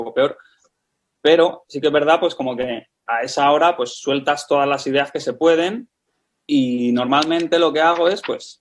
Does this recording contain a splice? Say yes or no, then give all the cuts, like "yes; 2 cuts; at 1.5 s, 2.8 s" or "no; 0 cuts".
no; 0 cuts